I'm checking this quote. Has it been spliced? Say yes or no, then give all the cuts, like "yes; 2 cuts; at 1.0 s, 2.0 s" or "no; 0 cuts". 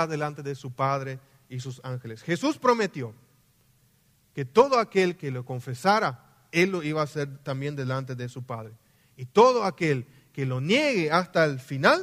no; 0 cuts